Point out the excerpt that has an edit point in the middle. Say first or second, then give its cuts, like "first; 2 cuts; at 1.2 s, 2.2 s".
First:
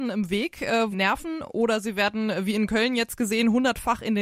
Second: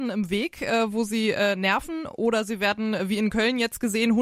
first; 1 cut; at 0.9 s